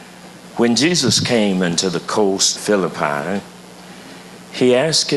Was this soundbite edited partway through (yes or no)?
yes